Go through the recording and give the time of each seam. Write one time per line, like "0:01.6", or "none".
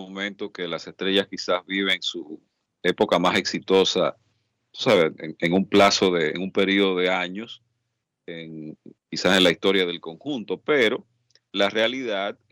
0:04.6
0:05.4